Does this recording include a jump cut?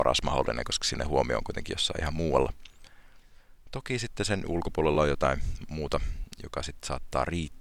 no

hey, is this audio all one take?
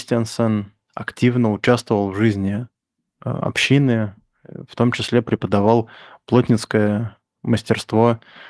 yes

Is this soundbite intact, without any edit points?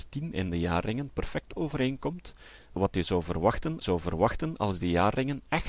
no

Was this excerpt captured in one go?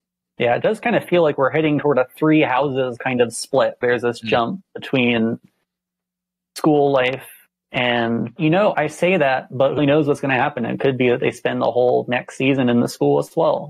no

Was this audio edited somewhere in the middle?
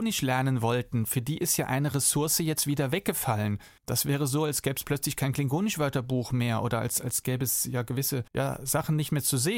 yes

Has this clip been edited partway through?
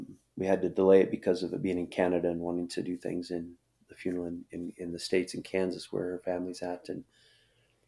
no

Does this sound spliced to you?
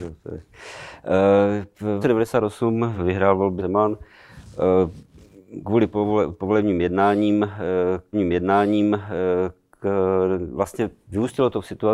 yes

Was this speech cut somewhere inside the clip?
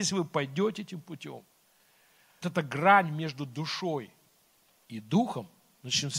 yes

